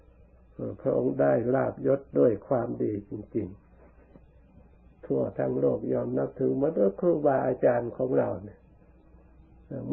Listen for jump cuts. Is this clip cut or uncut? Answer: uncut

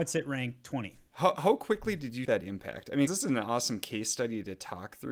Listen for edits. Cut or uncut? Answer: cut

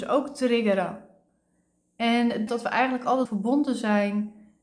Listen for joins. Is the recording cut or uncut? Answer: cut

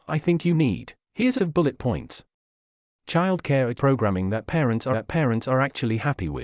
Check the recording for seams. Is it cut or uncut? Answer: cut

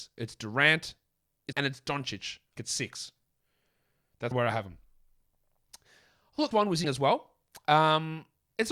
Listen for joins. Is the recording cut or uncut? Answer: cut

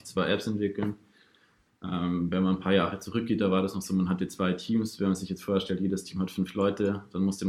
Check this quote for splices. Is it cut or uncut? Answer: uncut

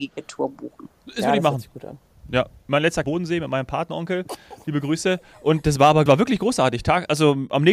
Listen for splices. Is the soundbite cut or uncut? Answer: cut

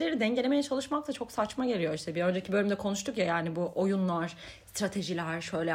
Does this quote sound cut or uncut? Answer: uncut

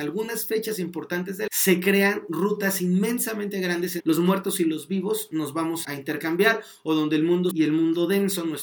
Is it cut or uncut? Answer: cut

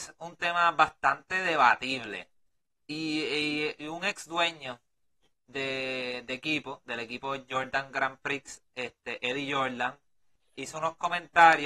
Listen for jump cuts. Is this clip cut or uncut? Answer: uncut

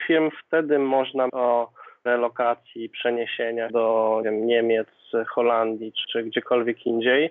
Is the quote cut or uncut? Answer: cut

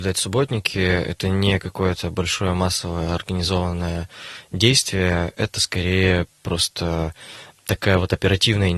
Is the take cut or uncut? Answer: uncut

